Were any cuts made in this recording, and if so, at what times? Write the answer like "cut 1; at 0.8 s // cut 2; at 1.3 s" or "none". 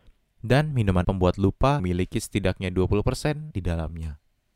cut 1; at 1.0 s // cut 2; at 1.8 s // cut 3; at 3.5 s